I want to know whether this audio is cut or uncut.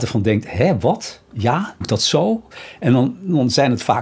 cut